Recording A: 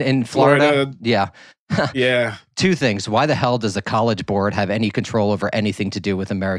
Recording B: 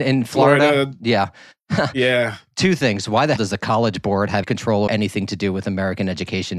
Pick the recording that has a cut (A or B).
B